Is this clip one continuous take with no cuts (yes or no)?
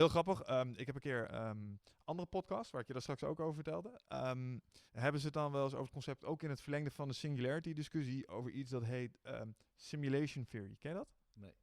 no